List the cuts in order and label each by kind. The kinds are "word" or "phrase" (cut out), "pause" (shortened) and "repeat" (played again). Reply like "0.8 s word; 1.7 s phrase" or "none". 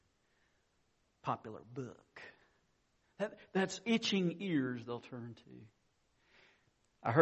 none